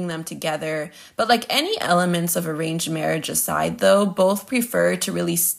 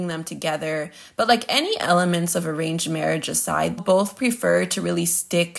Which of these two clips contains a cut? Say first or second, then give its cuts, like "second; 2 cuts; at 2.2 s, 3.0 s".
second; 1 cut; at 3.8 s